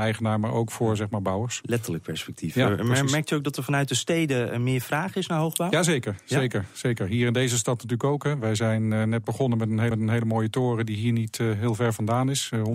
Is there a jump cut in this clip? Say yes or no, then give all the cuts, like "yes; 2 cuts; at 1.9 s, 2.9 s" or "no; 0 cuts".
yes; 1 cut; at 9.9 s